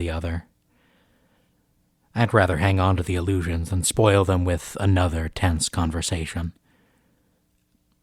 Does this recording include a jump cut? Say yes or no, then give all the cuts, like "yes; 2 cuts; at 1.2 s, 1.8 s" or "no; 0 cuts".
no; 0 cuts